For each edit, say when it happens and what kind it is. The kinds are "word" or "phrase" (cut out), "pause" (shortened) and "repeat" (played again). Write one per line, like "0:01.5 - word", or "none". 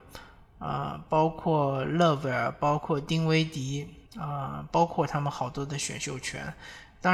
0:04.1 - pause